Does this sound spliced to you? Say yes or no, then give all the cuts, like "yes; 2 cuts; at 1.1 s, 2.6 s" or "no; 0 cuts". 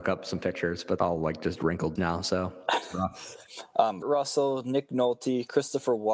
yes; 3 cuts; at 1.0 s, 2.0 s, 4.0 s